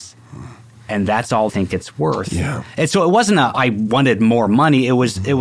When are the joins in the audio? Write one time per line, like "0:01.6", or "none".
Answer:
0:01.5
0:03.5